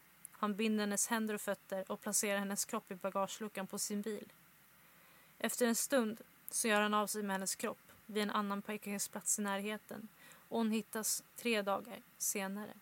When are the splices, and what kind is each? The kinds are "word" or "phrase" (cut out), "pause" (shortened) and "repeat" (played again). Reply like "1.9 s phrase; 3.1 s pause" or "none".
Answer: none